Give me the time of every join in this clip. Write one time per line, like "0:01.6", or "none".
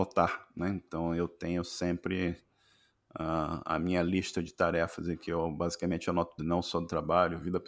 0:06.4

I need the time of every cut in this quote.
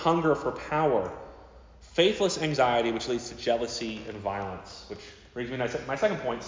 none

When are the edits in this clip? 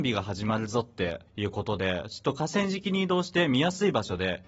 0:01.3

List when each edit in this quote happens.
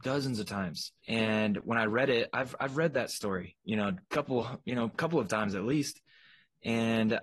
0:01.0
0:04.0

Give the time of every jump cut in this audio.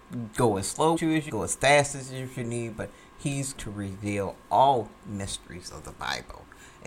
0:01.0
0:01.3
0:03.6

